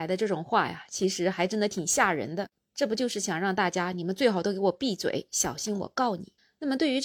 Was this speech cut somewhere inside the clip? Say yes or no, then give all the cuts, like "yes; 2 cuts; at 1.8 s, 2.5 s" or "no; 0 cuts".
no; 0 cuts